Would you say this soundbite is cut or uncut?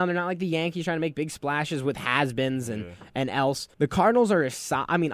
cut